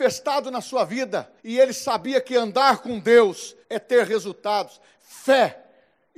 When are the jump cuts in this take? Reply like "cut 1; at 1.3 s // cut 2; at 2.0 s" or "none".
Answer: cut 1; at 1.4 s // cut 2; at 3.6 s